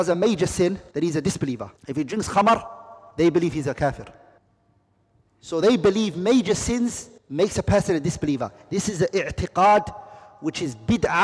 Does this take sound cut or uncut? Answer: cut